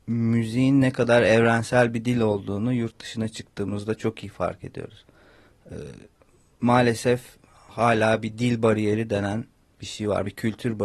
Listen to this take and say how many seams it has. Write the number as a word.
zero